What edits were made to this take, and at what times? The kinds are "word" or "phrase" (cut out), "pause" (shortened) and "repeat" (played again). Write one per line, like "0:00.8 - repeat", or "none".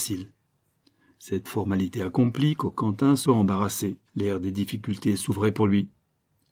0:01.4 - word
0:03.2 - phrase
0:04.1 - pause